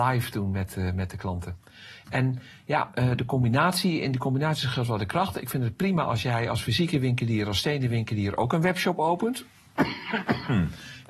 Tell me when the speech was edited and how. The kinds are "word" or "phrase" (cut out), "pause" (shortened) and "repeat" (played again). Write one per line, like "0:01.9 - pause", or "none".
none